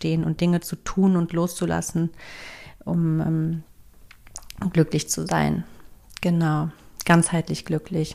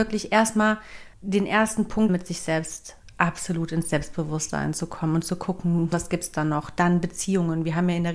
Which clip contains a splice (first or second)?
second